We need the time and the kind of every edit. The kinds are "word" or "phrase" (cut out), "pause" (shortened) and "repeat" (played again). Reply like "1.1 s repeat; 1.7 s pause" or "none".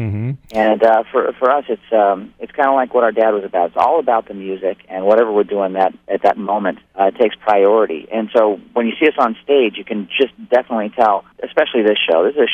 6.9 s pause; 11.3 s pause